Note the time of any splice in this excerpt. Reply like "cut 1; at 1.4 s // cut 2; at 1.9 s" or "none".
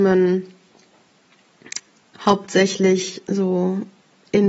none